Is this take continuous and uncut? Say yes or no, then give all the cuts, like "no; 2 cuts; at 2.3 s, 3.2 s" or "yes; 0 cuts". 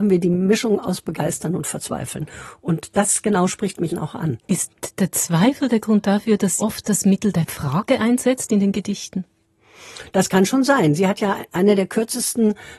no; 3 cuts; at 3.9 s, 4.4 s, 6.6 s